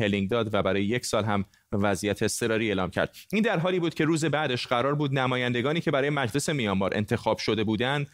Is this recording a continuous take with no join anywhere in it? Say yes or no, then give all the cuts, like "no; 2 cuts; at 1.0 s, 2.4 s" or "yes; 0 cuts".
yes; 0 cuts